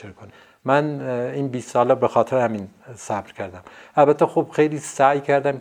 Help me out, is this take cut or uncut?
uncut